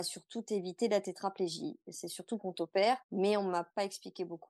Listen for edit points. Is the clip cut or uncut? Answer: cut